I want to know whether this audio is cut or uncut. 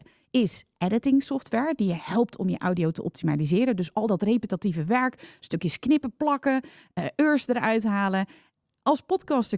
uncut